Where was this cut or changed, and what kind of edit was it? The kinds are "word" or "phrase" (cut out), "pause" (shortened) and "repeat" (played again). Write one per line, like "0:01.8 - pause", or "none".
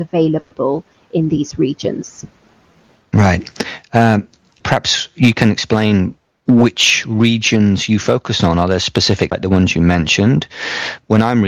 0:04.6 - word
0:09.3 - word